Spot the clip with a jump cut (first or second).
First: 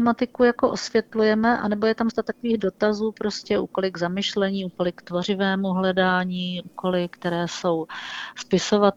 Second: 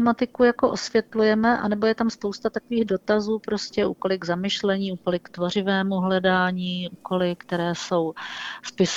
first